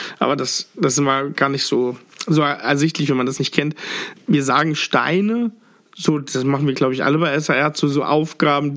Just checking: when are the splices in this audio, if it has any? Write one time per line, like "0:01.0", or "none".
none